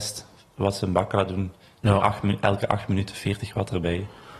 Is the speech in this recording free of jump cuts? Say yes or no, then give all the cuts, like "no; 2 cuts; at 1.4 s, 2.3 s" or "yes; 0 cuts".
yes; 0 cuts